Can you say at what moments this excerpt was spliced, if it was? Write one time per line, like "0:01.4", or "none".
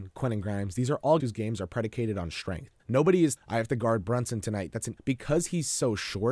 0:01.2
0:02.8
0:03.4
0:05.0